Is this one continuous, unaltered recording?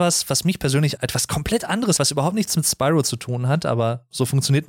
no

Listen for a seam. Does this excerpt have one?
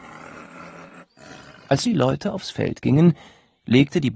yes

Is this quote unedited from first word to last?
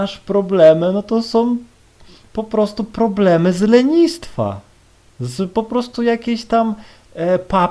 yes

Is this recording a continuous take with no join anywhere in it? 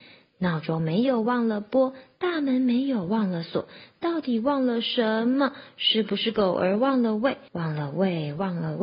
no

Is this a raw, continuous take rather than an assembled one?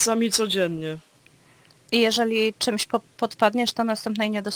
yes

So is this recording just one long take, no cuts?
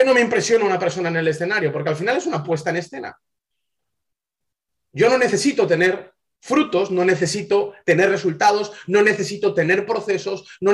yes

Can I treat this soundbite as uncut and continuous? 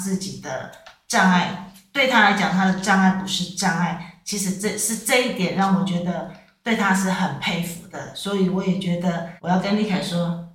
no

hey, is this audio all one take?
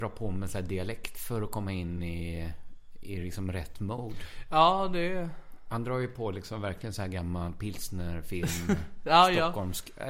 yes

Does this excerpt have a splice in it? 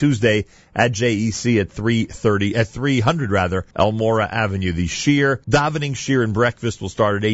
yes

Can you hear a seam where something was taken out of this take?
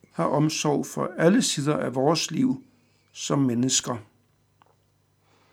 no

